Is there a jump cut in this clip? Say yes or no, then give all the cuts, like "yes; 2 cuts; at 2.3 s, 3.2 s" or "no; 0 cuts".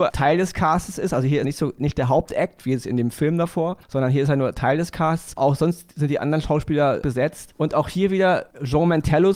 yes; 2 cuts; at 1.4 s, 7.0 s